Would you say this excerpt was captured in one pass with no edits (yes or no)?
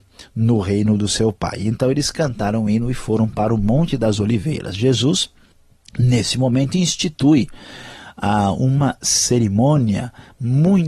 yes